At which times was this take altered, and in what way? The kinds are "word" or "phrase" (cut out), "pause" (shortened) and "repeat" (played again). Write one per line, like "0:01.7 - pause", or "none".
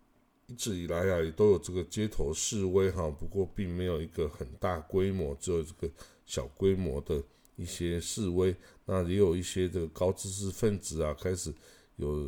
none